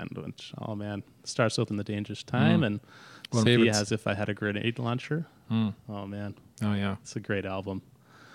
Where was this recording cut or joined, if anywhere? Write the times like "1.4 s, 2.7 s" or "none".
1.7 s, 3.4 s

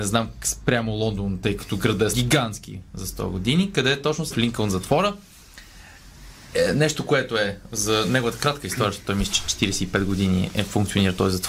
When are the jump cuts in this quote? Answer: 2.1 s, 4.3 s

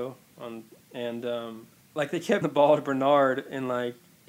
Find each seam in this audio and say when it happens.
2.4 s

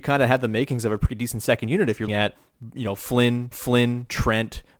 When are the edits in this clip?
2.1 s, 3.5 s

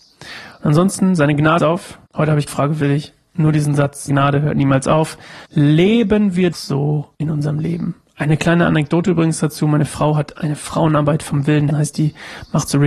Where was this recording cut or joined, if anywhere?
1.6 s, 2.1 s, 2.5 s, 4.1 s, 5.4 s, 6.5 s, 7.1 s, 11.7 s

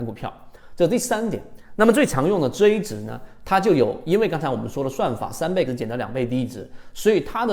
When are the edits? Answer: 5.7 s

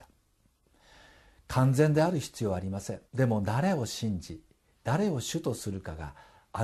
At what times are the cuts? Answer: 3.1 s

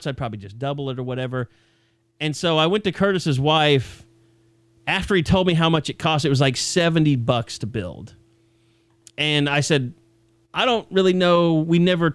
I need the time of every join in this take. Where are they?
none

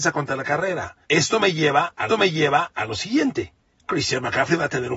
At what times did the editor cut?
1.0 s, 2.1 s, 3.6 s

